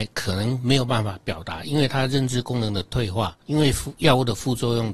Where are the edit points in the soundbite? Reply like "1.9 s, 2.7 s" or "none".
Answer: 3.4 s